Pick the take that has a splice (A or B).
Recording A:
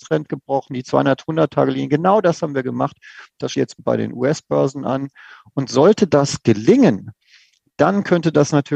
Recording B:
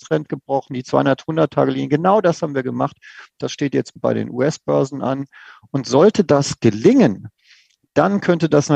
A